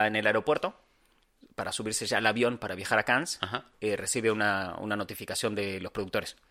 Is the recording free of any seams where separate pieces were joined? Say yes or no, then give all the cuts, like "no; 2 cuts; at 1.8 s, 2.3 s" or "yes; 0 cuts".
no; 1 cut; at 3.7 s